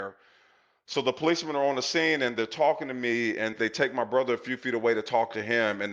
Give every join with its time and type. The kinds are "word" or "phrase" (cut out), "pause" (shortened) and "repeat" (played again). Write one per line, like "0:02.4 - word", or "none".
0:03.5 - word

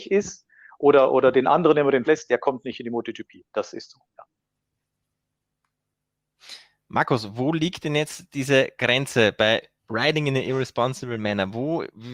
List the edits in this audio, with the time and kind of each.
0:02.0 - word
0:09.8 - pause

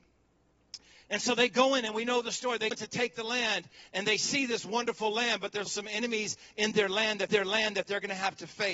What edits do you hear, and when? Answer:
0:02.7 - word
0:05.7 - word
0:07.3 - repeat

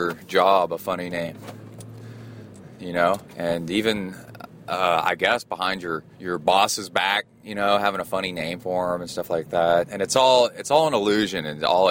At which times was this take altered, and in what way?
0:03.3 - pause
0:06.1 - pause

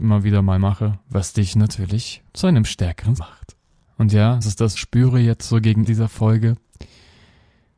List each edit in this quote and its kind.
0:01.0 - pause
0:02.3 - pause
0:03.2 - word
0:03.8 - pause
0:04.4 - word
0:04.8 - phrase
0:05.9 - word

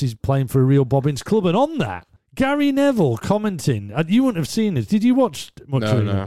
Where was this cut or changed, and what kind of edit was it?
0:02.2 - pause

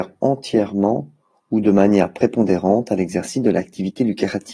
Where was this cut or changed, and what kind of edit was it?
none

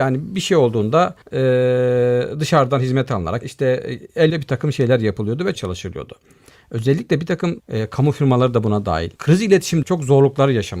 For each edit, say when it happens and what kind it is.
0:01.2 - pause
0:03.4 - phrase
0:04.3 - word
0:05.5 - word
0:07.6 - word
0:09.2 - pause
0:09.8 - word

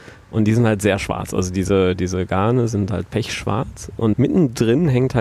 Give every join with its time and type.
0:04.1 - word

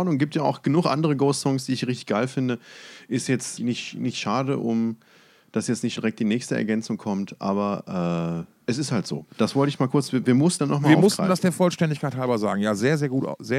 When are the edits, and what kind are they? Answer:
0:03.6 - word
0:06.0 - word
0:10.6 - word

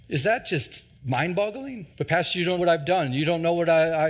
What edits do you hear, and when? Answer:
0:01.0 - pause
0:01.9 - pause
0:02.6 - word

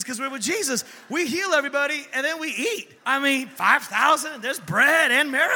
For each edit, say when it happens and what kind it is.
0:03.0 - pause

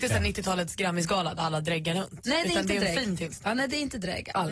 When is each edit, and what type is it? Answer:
none

